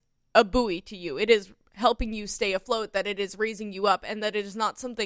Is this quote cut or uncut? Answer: uncut